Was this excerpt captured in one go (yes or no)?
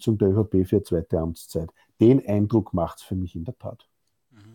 yes